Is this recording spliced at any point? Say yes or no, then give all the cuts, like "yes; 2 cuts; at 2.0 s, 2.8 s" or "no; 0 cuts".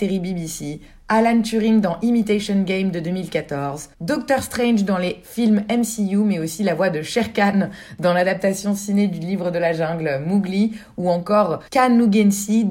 yes; 2 cuts; at 3.9 s, 11.7 s